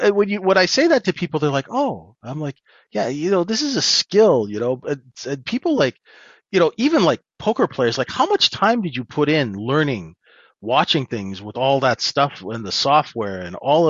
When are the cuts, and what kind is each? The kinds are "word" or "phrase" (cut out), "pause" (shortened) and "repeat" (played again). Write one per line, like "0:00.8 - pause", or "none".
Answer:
none